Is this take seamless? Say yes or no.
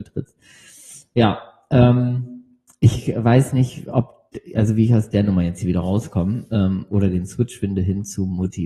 yes